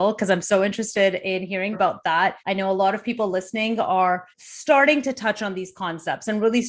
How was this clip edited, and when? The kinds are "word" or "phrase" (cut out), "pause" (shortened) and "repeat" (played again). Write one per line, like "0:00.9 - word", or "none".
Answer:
0:01.7 - word
0:02.4 - pause
0:04.3 - pause